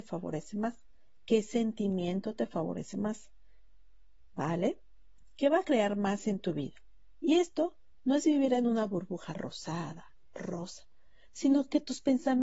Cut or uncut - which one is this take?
uncut